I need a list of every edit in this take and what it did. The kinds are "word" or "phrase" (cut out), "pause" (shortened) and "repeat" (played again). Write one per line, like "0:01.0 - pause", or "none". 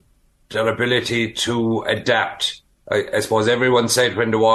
none